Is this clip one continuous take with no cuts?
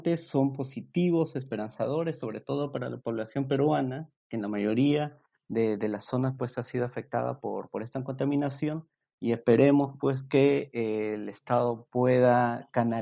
yes; 0 cuts

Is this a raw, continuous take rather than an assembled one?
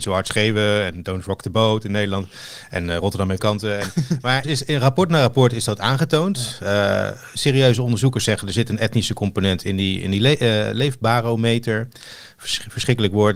no; 2 cuts; at 3.4 s, 4.4 s

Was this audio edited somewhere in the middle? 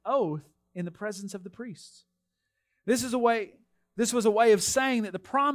no; 0 cuts

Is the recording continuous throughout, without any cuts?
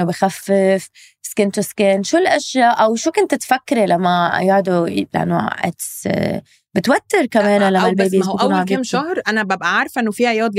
yes; 0 cuts

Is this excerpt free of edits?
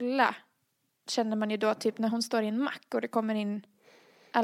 yes; 0 cuts

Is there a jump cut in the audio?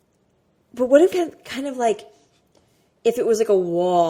yes; 1 cut; at 1.1 s

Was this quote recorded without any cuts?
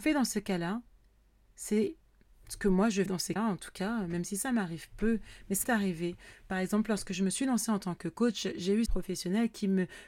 no; 4 cuts; at 3.1 s, 3.4 s, 5.6 s, 8.9 s

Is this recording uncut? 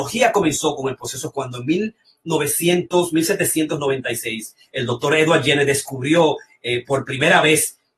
yes; 0 cuts

